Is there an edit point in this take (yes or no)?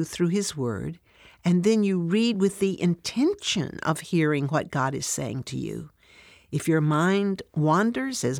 no